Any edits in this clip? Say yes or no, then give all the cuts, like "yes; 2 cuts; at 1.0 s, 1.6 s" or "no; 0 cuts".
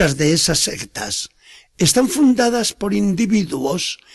no; 0 cuts